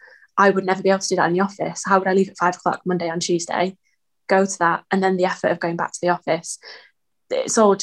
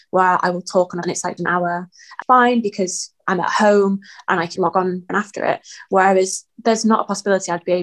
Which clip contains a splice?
second; 6 cuts; at 1.0 s, 1.4 s, 2.2 s, 3.2 s, 4.6 s, 5.1 s

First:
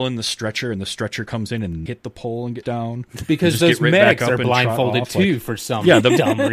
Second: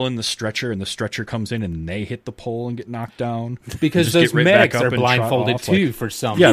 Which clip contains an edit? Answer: first; 2 cuts; at 1.9 s, 2.6 s

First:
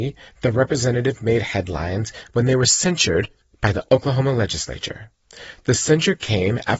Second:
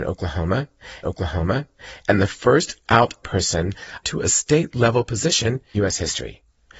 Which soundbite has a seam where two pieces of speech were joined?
second; 4 cuts; at 1.0 s, 3.2 s, 4.0 s, 5.7 s

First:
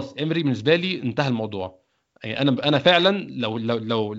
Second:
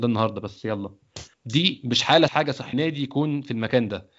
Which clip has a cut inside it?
second; 3 cuts; at 1.3 s, 2.3 s, 2.7 s

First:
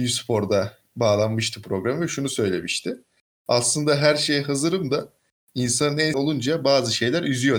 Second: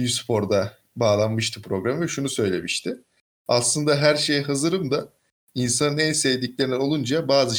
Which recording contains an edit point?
first; 1 cut; at 6.1 s

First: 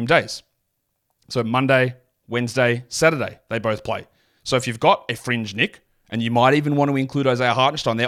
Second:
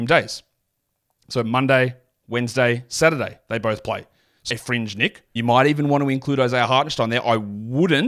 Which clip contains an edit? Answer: second; 2 cuts; at 4.5 s, 5.4 s

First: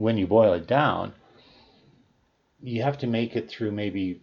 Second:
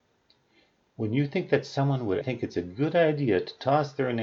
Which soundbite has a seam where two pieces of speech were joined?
second; 1 cut; at 2.2 s

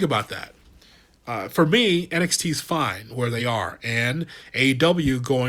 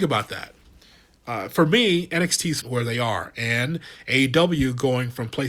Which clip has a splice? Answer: second; 1 cut; at 2.6 s

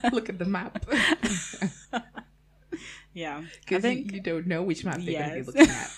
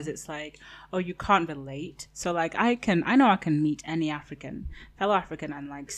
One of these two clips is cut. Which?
first; 1 cut; at 1.8 s

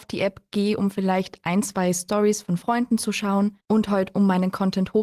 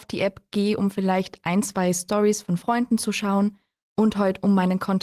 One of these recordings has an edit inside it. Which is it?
first; 1 cut; at 3.6 s

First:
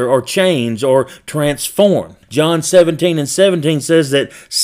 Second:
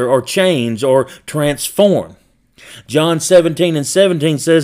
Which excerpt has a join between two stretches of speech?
first; 1 cut; at 2.2 s

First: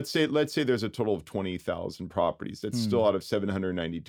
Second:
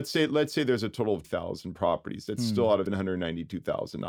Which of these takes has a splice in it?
second; 2 cuts; at 1.2 s, 2.9 s

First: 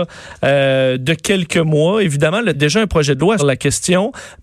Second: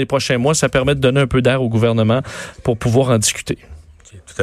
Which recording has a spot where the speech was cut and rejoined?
first; 2 cuts; at 2.5 s, 3.4 s

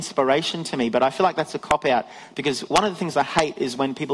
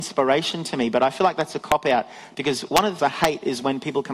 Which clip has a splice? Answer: second; 1 cut; at 3.0 s

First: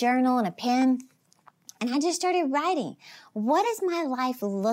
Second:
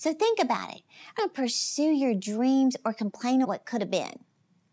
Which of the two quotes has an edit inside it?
second; 2 cuts; at 1.2 s, 3.4 s

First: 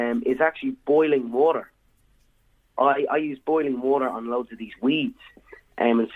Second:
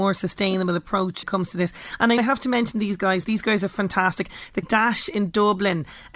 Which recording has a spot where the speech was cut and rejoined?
second; 4 cuts; at 1.2 s, 2.2 s, 3.2 s, 4.6 s

